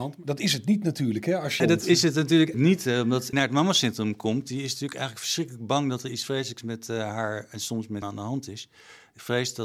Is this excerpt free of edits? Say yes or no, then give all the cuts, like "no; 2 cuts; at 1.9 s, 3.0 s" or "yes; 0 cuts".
no; 4 cuts; at 1.6 s, 2.5 s, 3.3 s, 8.0 s